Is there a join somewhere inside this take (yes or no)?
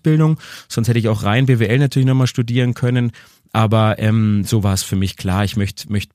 no